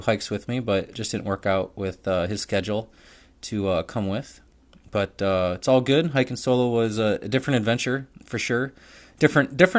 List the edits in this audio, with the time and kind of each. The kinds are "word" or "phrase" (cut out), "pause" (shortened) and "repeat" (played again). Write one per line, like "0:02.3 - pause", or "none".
none